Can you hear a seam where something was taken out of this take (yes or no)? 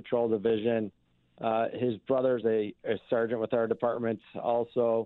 no